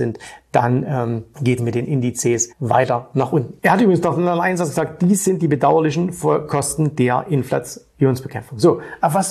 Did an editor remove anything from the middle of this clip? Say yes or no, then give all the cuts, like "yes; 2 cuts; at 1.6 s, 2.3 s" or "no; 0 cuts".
yes; 2 cuts; at 1.6 s, 2.5 s